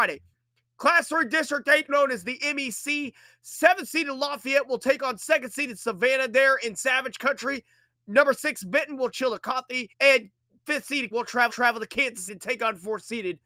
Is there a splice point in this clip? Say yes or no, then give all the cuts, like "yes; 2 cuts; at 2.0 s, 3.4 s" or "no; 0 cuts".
yes; 6 cuts; at 1.9 s, 9.1 s, 9.9 s, 11.1 s, 11.5 s, 12.3 s